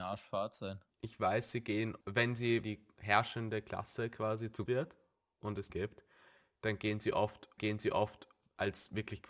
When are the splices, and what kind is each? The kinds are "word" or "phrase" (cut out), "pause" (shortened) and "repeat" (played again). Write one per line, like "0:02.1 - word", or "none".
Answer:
0:02.0 - word
0:02.6 - word
0:04.7 - word
0:05.7 - phrase
0:07.6 - repeat

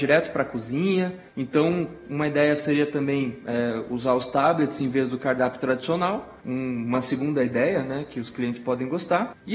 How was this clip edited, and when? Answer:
0:01.3 - pause
0:06.4 - pause

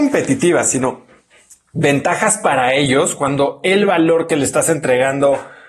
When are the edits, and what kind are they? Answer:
none

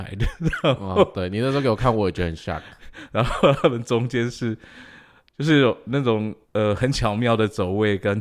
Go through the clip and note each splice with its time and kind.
0:06.4 - pause

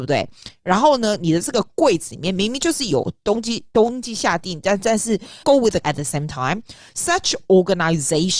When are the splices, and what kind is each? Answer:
0:05.4 - word
0:05.8 - word

